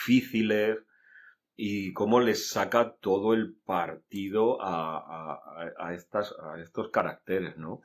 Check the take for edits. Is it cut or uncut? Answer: uncut